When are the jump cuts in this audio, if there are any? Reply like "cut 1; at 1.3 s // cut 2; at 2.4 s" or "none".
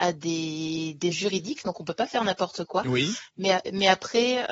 cut 1; at 1.1 s